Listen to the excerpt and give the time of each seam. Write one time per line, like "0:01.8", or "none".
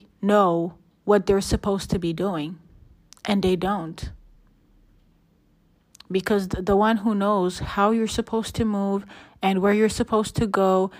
none